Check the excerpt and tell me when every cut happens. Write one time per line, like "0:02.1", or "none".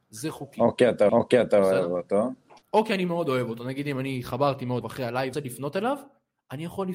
0:01.1
0:02.6
0:04.8
0:05.3